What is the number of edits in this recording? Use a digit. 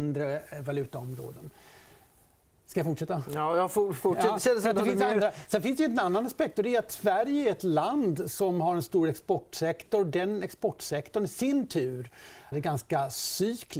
1